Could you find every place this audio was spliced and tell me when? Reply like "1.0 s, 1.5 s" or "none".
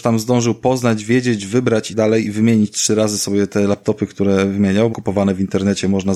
1.9 s, 4.9 s